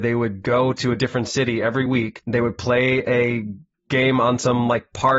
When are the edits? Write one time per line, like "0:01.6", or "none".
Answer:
none